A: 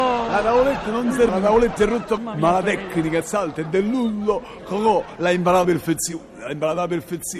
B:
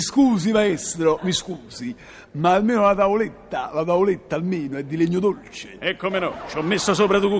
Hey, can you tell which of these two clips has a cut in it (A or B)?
A